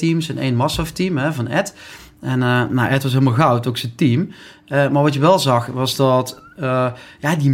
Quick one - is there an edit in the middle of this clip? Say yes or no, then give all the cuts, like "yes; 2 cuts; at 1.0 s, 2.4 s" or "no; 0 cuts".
no; 0 cuts